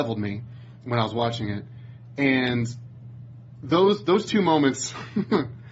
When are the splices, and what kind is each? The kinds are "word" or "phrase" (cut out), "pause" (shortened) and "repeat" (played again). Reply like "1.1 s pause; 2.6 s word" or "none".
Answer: none